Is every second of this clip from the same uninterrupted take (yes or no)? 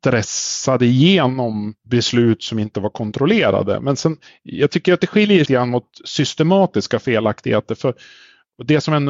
no